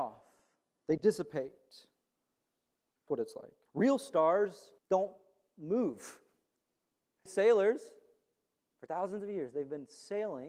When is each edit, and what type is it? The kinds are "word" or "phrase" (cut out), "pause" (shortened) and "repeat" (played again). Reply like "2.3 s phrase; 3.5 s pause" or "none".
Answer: 3.1 s word; 3.6 s pause; 4.8 s pause; 7.3 s word

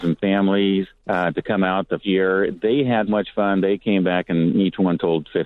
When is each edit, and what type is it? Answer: 1.0 s pause; 2.0 s word; 3.1 s word

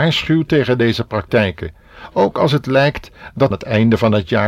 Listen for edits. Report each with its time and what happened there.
3.5 s phrase

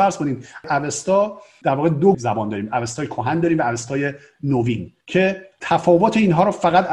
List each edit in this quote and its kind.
2.1 s word; 5.0 s pause

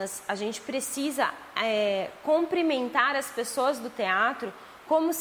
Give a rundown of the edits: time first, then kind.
none

